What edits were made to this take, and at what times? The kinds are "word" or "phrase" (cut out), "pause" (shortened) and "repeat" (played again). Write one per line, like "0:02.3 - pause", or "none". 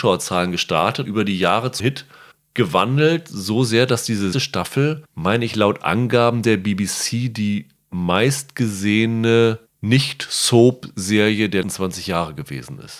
0:01.0 - phrase
0:01.8 - word
0:02.3 - pause
0:04.3 - word
0:11.6 - word